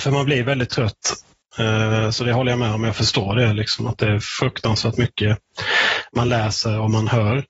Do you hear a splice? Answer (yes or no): no